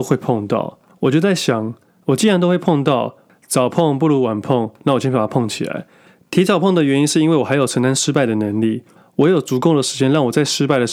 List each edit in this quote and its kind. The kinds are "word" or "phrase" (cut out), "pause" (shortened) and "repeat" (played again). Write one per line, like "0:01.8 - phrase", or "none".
none